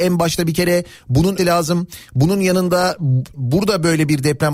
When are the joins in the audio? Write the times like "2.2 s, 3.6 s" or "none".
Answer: 1.4 s, 3.3 s